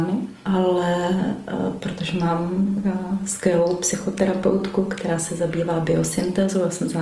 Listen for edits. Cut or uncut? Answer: uncut